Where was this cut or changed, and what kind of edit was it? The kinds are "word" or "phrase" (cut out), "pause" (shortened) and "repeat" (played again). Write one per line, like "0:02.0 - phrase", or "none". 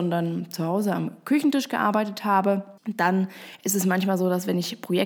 0:02.8 - pause